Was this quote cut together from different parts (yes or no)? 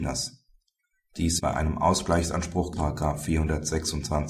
yes